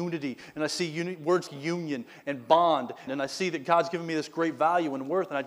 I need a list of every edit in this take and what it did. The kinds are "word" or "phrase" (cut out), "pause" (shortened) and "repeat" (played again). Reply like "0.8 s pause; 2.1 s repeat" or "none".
1.5 s word; 3.1 s phrase